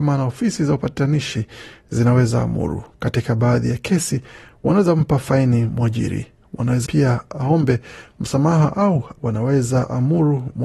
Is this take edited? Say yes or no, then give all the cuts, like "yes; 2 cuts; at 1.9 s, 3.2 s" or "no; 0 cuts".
yes; 1 cut; at 6.9 s